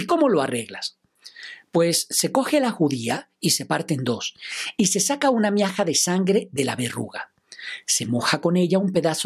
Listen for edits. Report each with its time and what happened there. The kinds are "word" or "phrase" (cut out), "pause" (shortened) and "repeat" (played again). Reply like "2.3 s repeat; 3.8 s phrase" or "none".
none